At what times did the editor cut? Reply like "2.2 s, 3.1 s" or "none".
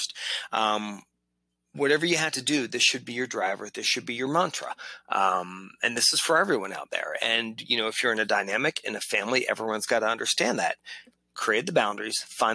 none